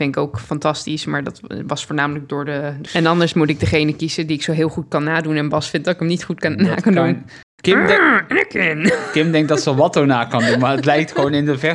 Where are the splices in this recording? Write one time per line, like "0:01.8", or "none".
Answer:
0:02.9